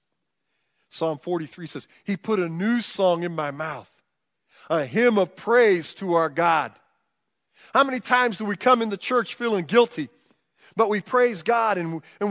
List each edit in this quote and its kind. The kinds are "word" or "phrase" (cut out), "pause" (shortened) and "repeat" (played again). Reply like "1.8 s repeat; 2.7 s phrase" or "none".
none